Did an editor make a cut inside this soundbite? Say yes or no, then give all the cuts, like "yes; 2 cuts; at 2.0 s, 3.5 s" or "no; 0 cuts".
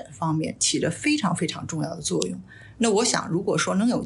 no; 0 cuts